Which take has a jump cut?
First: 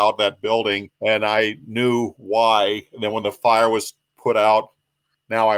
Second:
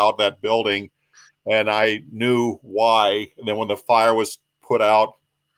first; 1 cut; at 0.9 s

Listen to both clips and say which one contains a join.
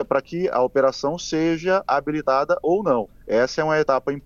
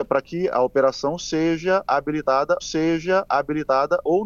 second; 1 cut; at 2.6 s

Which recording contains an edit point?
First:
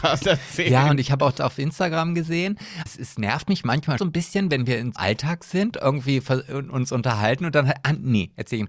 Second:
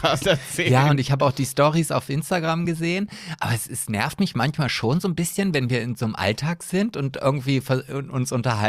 first; 5 cuts; at 1.4 s, 2.9 s, 4.0 s, 5.0 s, 5.7 s

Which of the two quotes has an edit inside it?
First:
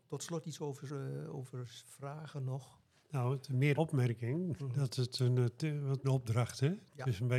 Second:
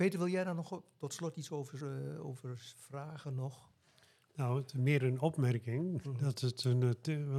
first; 3 cuts; at 3.0 s, 3.7 s, 6.0 s

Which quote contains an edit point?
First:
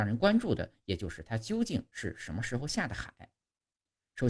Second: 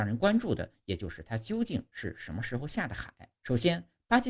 second; 1 cut; at 3.4 s

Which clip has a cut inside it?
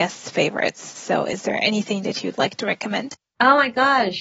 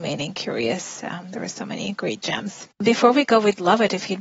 second; 1 cut; at 2.7 s

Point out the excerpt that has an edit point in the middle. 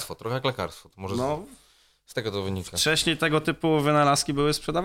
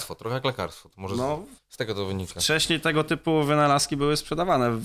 second; 1 cut; at 1.6 s

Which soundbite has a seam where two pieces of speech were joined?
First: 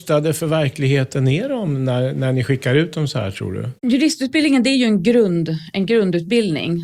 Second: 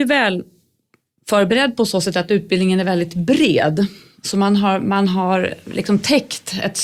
first; 1 cut; at 3.8 s

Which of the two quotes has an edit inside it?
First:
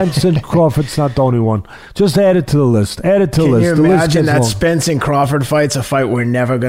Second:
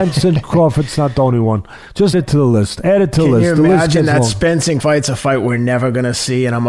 second; 2 cuts; at 2.1 s, 4.8 s

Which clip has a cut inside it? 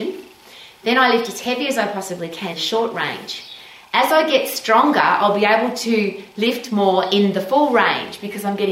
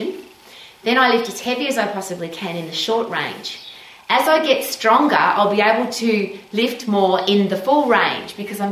first; 1 cut; at 2.5 s

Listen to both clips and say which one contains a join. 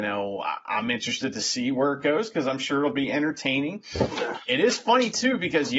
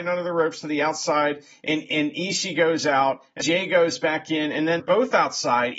second; 2 cuts; at 3.4 s, 4.8 s

